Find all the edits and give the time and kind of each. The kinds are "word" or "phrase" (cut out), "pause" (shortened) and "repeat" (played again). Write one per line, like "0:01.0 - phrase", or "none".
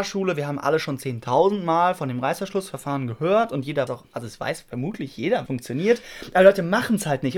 0:03.9 - word
0:05.5 - word

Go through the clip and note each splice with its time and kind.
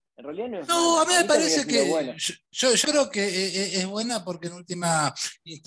0:02.5 - pause
0:02.8 - word

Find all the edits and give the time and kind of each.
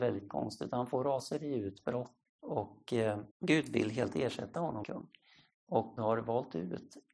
0:02.3 - word
0:03.3 - pause
0:04.1 - word
0:04.8 - phrase
0:06.0 - word

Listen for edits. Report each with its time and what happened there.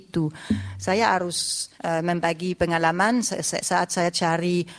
0:01.8 - pause

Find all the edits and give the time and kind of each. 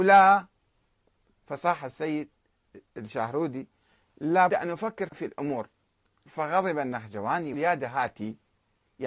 0:04.5 - word
0:05.1 - word
0:06.3 - word
0:07.5 - word

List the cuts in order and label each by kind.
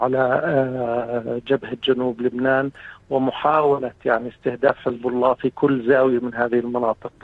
none

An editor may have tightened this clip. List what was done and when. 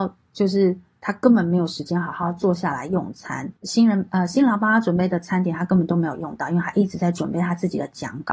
0:03.6 - pause

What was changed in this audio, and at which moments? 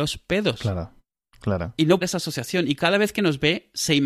0:02.0 - phrase

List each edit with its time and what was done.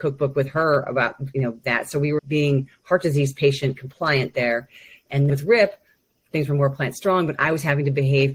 0:01.3 - word
0:02.2 - word
0:05.3 - word

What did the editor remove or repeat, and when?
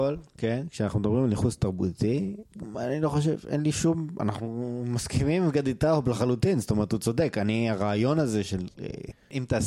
none

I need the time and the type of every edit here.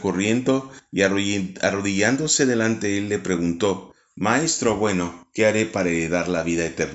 none

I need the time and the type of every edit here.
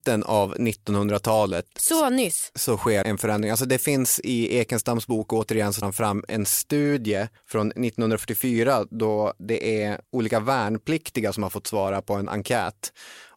0:03.0 - word
0:05.8 - word
0:07.4 - pause
0:10.0 - pause

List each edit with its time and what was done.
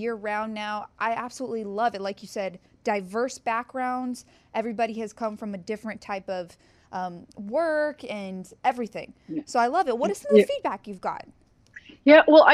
none

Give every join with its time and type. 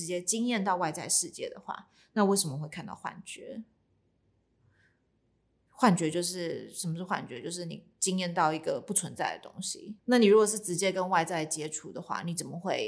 0:10.0 - pause

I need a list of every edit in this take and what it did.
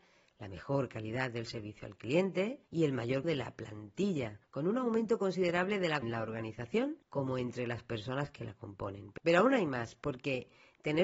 0:02.7 - pause
0:03.2 - word
0:04.4 - pause
0:06.0 - phrase
0:07.0 - pause

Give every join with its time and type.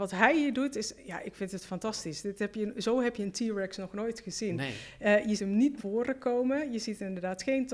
0:05.4 - word
0:05.8 - word

